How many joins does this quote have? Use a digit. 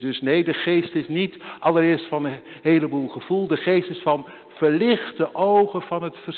0